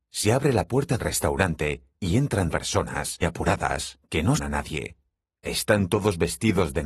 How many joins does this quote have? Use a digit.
4